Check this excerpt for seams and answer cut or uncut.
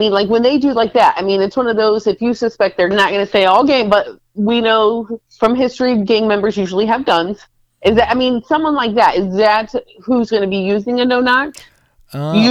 cut